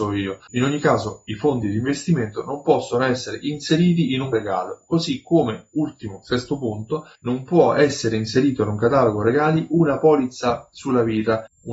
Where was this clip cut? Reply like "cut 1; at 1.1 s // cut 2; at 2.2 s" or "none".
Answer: cut 1; at 4.3 s // cut 2; at 7.1 s